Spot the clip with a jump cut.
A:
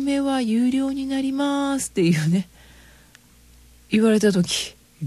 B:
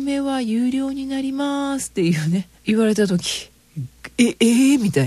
B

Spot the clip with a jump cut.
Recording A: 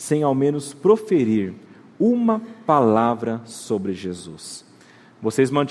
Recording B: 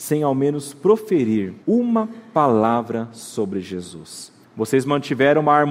B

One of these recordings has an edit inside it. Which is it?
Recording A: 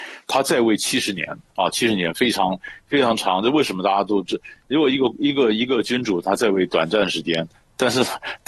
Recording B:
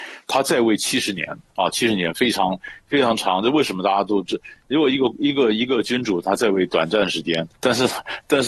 B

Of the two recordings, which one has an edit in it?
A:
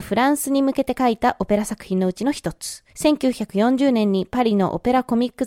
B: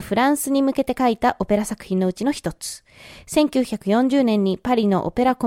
A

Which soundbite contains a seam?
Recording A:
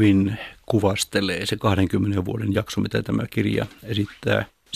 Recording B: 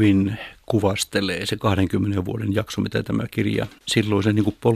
B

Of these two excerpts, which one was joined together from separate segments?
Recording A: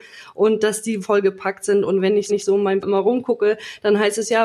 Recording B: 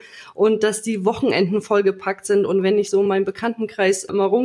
A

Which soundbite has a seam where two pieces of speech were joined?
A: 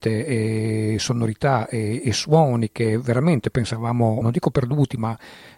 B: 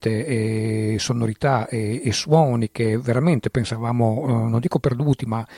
A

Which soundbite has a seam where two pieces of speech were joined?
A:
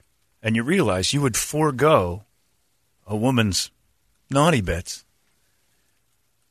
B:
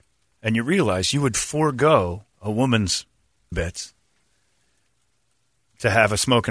B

